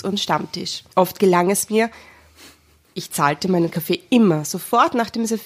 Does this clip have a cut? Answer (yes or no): yes